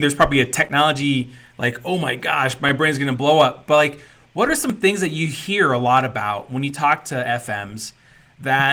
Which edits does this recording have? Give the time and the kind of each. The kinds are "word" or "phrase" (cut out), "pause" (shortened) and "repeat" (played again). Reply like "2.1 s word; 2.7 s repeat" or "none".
none